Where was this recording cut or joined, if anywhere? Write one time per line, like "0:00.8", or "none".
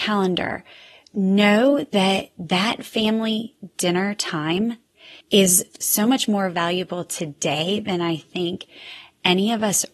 0:05.2